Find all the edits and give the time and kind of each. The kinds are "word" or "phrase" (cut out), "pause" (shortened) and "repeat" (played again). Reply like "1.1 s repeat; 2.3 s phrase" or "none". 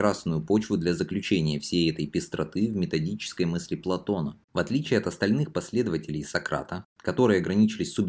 4.4 s pause